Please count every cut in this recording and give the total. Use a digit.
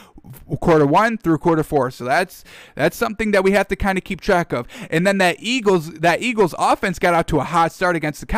0